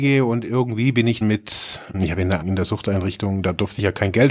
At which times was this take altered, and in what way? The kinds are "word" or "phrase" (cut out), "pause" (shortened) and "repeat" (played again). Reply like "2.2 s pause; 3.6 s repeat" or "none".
1.2 s word; 1.9 s word; 2.4 s word